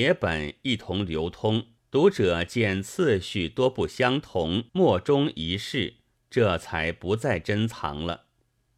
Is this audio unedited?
no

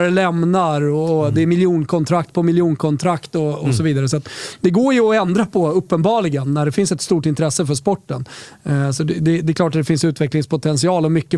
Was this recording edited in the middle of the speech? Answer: no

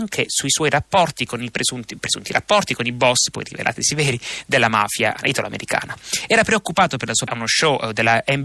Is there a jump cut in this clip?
yes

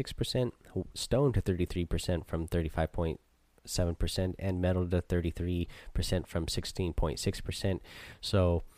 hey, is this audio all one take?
yes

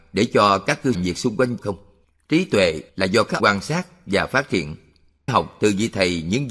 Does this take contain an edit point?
yes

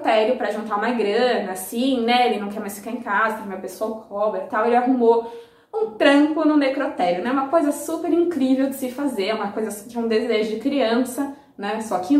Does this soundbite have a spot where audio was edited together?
no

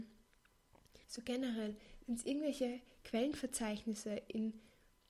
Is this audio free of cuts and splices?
no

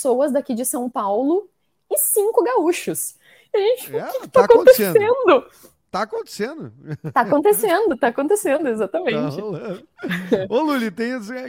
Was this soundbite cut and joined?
no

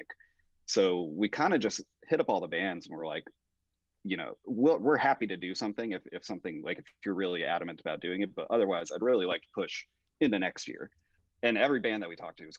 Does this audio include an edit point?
no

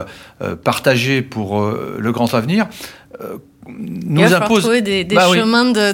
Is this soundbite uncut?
yes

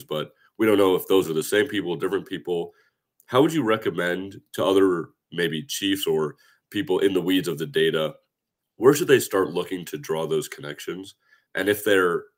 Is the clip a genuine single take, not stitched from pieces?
yes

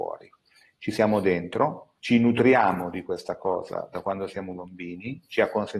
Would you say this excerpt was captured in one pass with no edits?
no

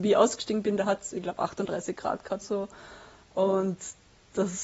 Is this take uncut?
no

